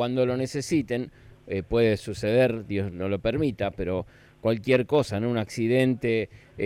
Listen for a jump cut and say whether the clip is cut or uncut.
uncut